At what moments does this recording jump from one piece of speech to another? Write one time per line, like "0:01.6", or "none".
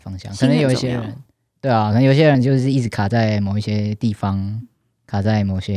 none